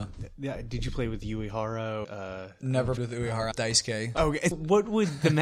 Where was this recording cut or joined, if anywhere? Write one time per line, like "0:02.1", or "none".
0:02.0
0:03.0
0:03.5
0:04.5